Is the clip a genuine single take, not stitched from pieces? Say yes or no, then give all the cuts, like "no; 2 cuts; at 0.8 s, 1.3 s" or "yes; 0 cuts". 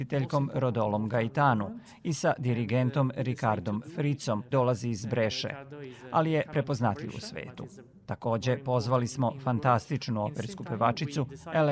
no; 1 cut; at 4.5 s